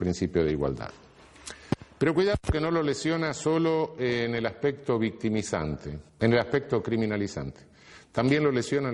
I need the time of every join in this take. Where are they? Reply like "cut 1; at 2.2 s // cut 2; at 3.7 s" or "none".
cut 1; at 6.1 s

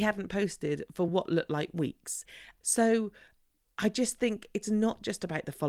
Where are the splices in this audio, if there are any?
none

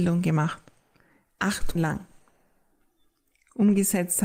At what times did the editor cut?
cut 1; at 1.7 s

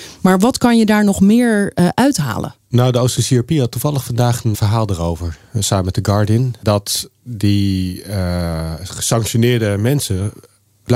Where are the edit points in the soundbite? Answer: cut 1; at 4.5 s

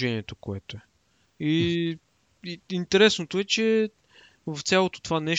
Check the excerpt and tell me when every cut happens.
cut 1; at 1.2 s

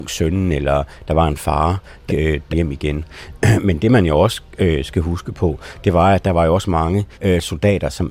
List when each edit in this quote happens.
cut 1; at 2.1 s // cut 2; at 2.5 s // cut 3; at 7.1 s

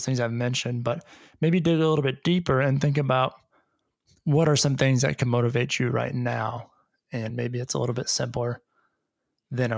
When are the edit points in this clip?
none

